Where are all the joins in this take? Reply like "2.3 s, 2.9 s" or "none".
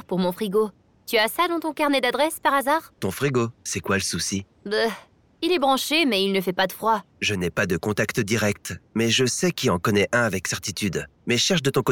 3.0 s, 3.6 s, 4.5 s, 7.1 s